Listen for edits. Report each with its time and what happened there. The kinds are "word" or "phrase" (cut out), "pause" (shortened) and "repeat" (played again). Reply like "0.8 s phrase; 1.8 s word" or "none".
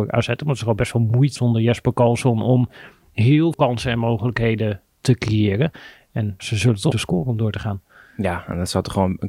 1.4 s word; 3.5 s word; 6.4 s word; 6.9 s word